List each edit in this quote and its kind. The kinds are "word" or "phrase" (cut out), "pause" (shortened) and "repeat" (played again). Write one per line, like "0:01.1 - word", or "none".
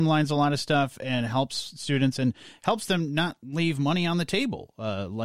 none